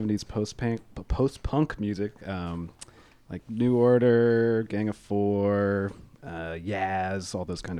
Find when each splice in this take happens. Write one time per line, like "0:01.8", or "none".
none